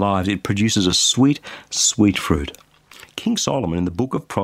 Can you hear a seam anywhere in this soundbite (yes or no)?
no